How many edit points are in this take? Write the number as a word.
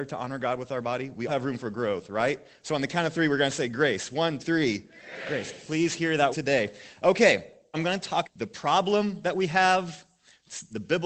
five